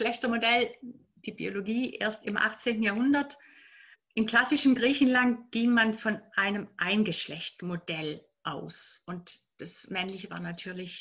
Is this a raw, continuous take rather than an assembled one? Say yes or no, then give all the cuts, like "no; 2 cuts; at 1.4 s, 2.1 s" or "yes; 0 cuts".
no; 1 cut; at 3.9 s